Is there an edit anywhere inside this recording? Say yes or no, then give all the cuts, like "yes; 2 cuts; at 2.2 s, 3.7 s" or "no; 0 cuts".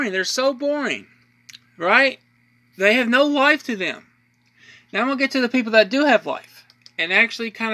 yes; 1 cut; at 2.4 s